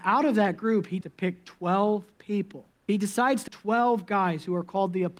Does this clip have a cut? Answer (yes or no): yes